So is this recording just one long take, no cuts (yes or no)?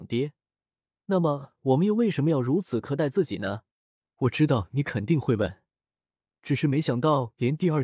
yes